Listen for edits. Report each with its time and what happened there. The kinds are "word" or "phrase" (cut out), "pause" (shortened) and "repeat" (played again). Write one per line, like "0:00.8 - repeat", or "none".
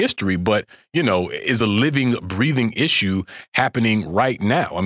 none

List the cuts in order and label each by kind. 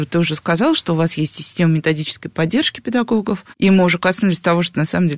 0:03.5 - pause

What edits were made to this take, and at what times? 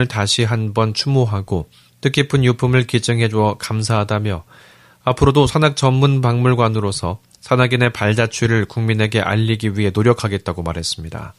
none

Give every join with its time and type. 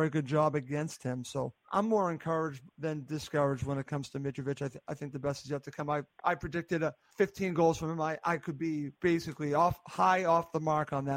0:01.6 - pause
0:02.7 - pause
0:07.1 - pause
0:09.0 - pause

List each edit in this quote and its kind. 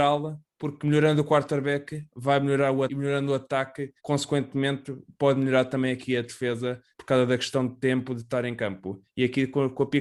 0:02.9 - word
0:04.0 - pause
0:06.9 - pause

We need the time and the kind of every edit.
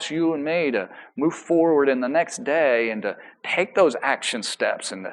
none

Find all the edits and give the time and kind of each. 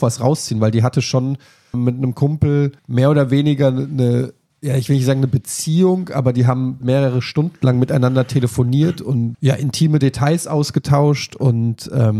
0:01.7 - word
0:02.8 - pause
0:04.5 - pause
0:06.8 - word
0:09.3 - word

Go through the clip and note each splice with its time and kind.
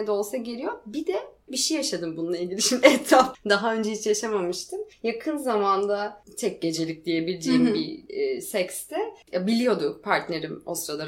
0:01.5 - word
0:03.3 - phrase

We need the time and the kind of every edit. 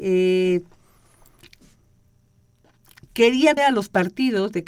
0:03.6 - word

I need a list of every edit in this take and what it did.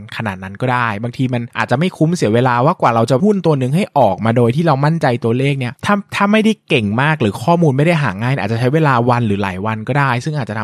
0:03.2 - word
0:05.8 - pause

